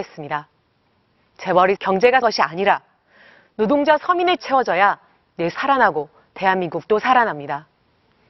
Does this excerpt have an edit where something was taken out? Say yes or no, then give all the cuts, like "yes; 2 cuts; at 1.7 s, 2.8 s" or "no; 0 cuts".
yes; 4 cuts; at 1.8 s, 2.2 s, 4.4 s, 5.5 s